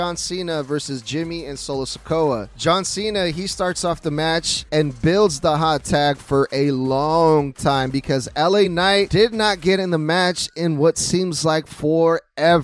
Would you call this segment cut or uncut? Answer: uncut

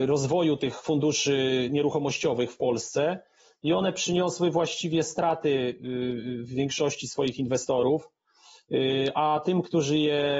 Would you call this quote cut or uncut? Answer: uncut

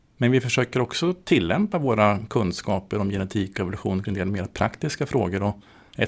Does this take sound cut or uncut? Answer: cut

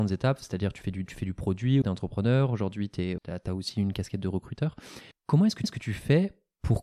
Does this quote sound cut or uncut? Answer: cut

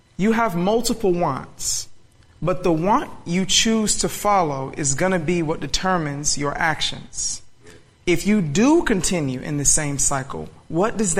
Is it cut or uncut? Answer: uncut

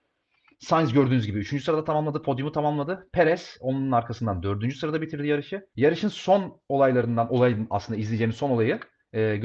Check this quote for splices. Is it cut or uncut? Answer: cut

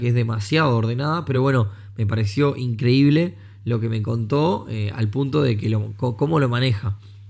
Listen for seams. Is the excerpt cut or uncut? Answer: uncut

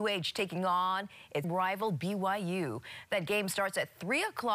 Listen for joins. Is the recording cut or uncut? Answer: cut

